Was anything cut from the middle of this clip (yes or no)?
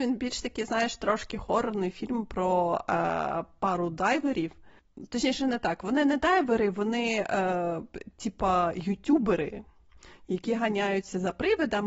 no